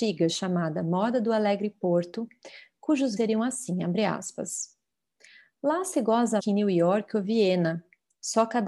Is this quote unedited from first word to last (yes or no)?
no